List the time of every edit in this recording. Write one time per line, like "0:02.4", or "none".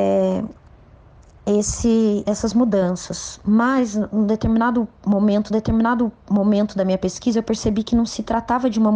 0:02.2
0:05.5